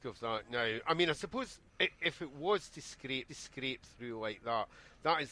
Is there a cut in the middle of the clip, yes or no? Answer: yes